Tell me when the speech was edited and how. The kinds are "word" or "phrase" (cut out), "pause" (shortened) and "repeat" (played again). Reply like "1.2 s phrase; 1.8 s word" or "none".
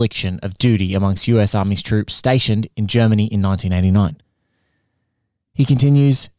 none